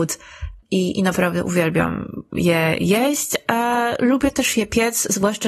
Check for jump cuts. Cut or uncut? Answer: uncut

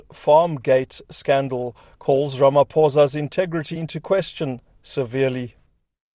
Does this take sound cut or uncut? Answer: uncut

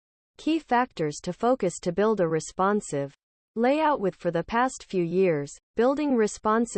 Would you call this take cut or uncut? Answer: cut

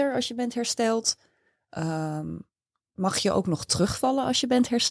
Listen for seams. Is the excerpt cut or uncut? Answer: uncut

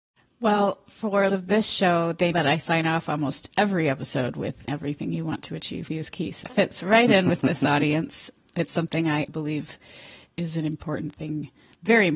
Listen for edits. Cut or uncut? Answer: cut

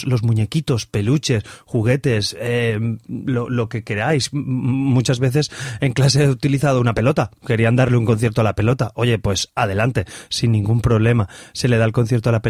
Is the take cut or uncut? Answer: uncut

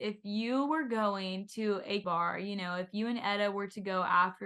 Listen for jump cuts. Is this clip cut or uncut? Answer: cut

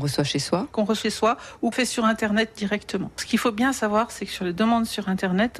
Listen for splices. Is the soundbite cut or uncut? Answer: cut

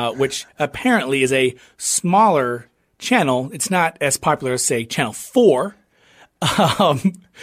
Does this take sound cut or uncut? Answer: uncut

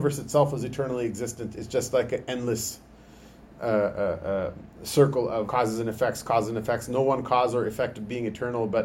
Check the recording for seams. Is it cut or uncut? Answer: cut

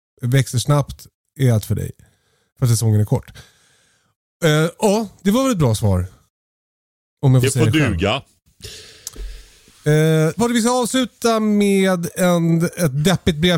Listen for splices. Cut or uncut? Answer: cut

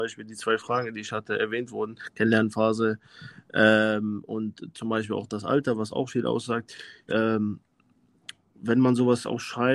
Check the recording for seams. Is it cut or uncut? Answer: cut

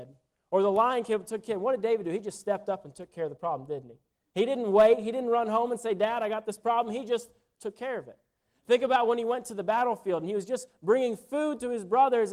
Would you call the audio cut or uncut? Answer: uncut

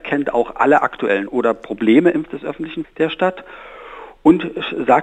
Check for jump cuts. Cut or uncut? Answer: cut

